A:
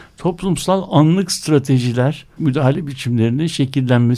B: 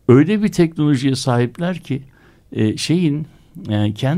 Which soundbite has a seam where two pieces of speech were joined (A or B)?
A